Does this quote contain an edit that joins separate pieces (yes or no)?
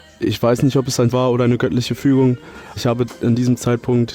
yes